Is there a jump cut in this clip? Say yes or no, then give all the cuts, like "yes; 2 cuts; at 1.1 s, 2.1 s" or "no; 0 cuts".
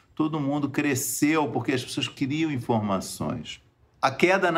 no; 0 cuts